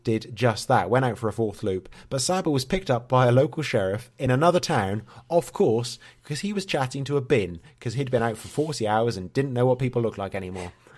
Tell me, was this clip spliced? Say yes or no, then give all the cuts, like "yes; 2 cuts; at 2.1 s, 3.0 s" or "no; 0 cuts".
no; 0 cuts